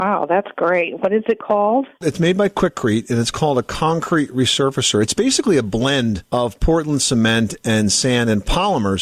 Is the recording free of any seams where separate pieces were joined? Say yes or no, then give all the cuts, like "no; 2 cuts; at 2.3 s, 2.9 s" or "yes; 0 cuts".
yes; 0 cuts